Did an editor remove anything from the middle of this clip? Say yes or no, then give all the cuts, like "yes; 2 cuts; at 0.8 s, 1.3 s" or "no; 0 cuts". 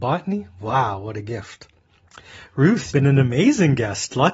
yes; 1 cut; at 2.9 s